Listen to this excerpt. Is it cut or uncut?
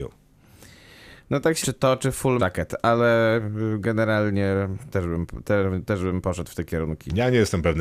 cut